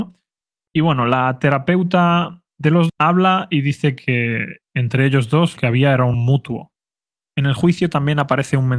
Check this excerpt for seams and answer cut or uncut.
cut